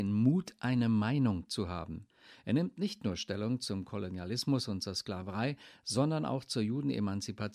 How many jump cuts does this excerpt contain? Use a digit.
0